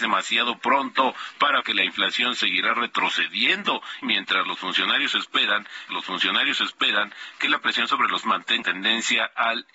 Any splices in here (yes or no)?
yes